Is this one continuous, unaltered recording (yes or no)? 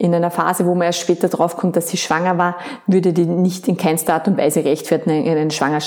yes